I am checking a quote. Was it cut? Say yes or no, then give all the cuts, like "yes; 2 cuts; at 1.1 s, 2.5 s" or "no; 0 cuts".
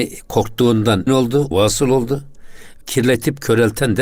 yes; 3 cuts; at 1.1 s, 1.5 s, 2.8 s